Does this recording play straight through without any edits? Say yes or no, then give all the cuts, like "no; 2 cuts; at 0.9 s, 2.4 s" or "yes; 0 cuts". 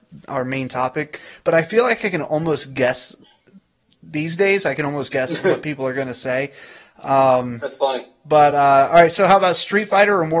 yes; 0 cuts